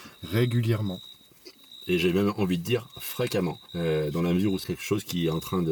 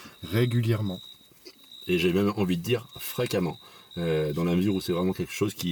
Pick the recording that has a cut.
first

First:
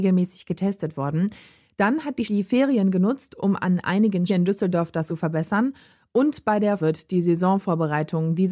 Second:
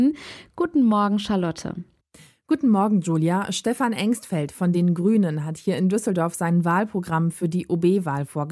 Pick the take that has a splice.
first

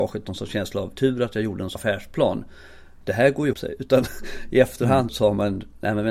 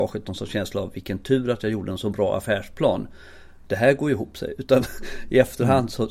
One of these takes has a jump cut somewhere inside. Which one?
first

